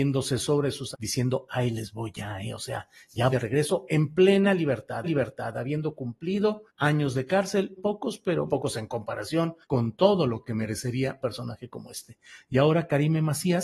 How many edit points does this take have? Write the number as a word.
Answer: eight